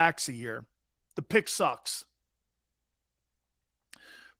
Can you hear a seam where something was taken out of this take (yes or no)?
no